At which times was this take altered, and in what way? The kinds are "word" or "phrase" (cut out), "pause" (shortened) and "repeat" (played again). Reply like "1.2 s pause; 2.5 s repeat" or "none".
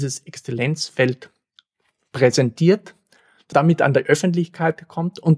3.5 s word